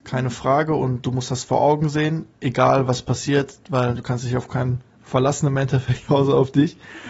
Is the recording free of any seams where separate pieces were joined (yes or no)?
yes